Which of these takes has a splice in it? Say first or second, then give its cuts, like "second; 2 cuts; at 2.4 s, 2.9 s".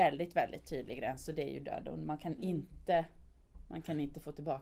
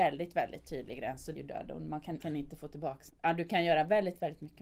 second; 3 cuts; at 1.3 s, 2.2 s, 3.1 s